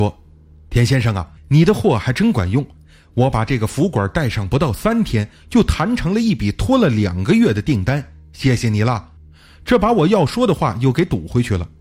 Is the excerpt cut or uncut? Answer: cut